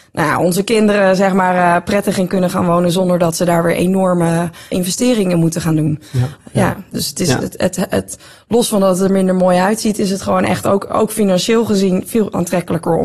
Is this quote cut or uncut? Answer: cut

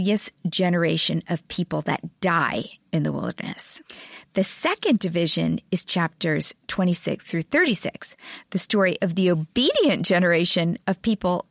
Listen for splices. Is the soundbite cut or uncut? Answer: uncut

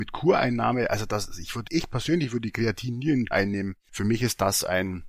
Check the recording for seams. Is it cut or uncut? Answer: cut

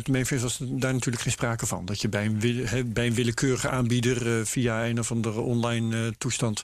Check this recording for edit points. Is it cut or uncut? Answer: uncut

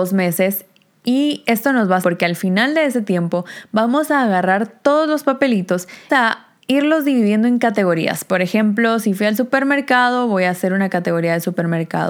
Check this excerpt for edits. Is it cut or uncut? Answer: cut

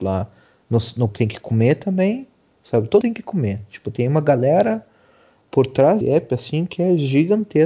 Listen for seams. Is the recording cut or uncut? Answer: cut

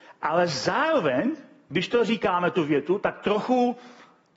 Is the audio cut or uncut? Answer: uncut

